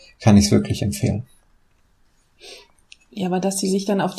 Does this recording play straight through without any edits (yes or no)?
yes